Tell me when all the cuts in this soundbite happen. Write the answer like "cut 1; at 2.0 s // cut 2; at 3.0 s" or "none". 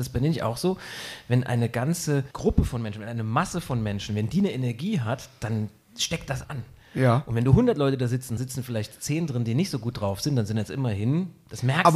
cut 1; at 2.3 s // cut 2; at 6.4 s // cut 3; at 8.4 s